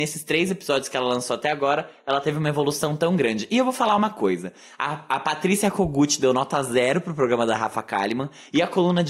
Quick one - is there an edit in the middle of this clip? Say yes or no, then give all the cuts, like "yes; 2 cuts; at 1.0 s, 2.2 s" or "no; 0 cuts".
no; 0 cuts